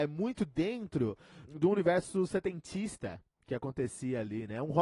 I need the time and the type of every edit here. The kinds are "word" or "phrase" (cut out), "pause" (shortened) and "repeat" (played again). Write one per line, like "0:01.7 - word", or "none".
0:01.5 - word